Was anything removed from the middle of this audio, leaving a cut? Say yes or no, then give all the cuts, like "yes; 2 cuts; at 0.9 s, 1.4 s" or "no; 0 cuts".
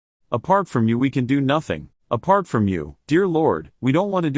yes; 1 cut; at 1.9 s